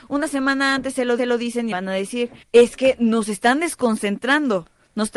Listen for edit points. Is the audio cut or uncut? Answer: cut